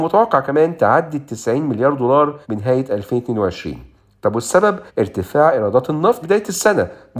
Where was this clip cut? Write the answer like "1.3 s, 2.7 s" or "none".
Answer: 2.4 s, 4.9 s, 6.2 s